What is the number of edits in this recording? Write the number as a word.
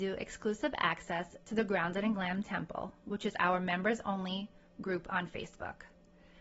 zero